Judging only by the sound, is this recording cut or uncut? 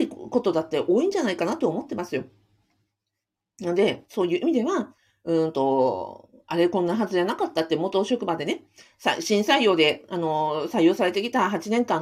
uncut